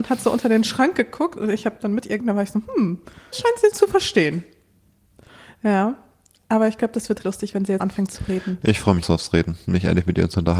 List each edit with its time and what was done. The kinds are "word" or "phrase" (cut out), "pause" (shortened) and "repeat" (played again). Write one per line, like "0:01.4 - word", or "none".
0:02.2 - word
0:03.3 - word
0:03.7 - word
0:07.2 - word
0:07.8 - word
0:09.0 - word